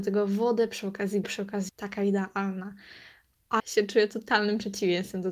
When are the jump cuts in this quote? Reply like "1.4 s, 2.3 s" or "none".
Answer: 1.2 s, 1.7 s, 3.6 s